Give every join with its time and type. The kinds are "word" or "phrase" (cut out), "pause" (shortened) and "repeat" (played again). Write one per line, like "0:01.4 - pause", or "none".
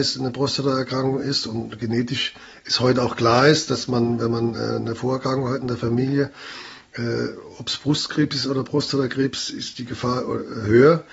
none